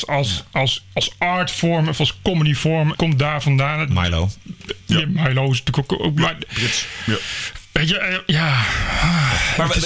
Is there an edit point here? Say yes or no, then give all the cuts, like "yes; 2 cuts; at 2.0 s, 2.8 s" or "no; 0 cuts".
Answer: yes; 1 cut; at 2.9 s